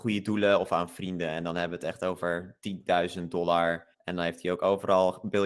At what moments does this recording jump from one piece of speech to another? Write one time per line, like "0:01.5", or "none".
0:03.9

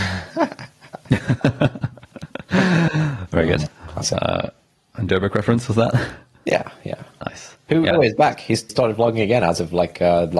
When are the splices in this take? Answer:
0:05.1
0:07.9
0:08.7

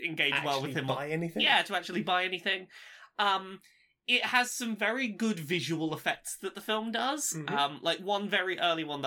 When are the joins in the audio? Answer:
none

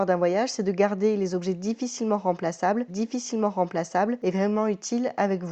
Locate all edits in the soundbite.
0:02.9

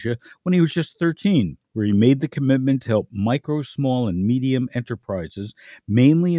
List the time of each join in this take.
0:01.6

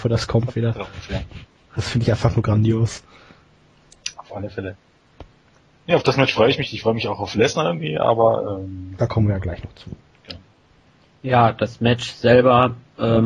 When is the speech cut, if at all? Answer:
none

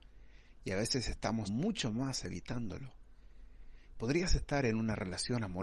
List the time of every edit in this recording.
0:01.5

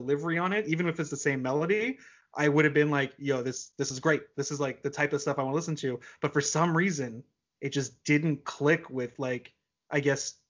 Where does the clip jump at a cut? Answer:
none

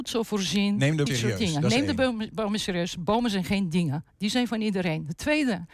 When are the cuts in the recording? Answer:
0:01.1

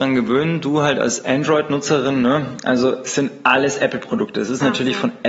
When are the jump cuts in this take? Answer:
none

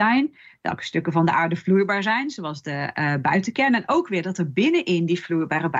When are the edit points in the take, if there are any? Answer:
none

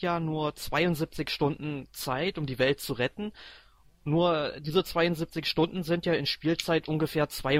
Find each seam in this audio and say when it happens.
none

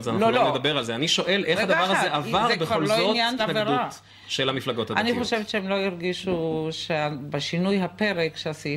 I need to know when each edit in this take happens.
0:03.4

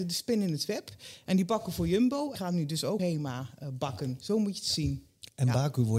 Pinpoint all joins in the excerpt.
0:02.4
0:03.0

